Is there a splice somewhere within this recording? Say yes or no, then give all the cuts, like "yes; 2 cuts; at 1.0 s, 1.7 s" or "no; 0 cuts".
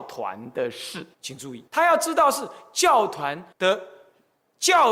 yes; 3 cuts; at 1.1 s, 1.7 s, 3.5 s